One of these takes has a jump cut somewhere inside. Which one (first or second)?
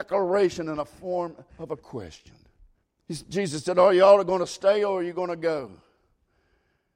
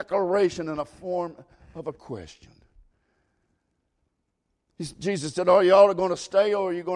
first